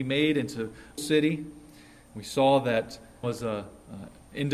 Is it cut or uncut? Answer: cut